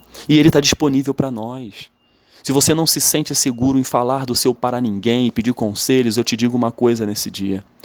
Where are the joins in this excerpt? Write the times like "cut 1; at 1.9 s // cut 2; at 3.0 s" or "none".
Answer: cut 1; at 4.6 s